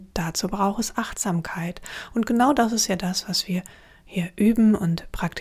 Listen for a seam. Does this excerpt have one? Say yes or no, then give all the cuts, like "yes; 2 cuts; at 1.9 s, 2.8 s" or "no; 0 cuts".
no; 0 cuts